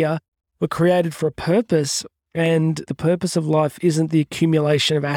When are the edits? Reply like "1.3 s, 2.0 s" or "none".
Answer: 2.9 s